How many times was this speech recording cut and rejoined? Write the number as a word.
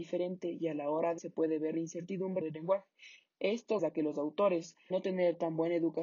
four